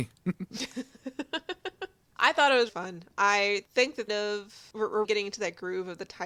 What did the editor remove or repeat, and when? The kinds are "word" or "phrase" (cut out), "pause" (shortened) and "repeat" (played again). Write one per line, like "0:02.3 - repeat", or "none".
0:02.7 - word
0:03.7 - pause
0:04.1 - phrase
0:05.0 - word